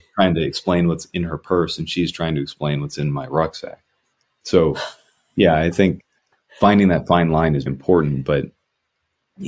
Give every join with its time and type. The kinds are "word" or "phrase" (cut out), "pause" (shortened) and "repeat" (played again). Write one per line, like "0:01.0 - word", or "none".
0:07.7 - word